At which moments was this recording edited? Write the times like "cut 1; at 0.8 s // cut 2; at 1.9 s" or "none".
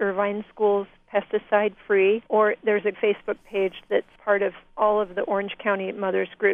cut 1; at 2.3 s // cut 2; at 2.9 s // cut 3; at 4.2 s